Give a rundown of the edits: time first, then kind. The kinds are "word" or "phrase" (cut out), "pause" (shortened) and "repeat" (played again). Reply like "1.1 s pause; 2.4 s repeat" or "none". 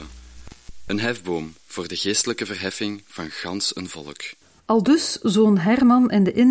none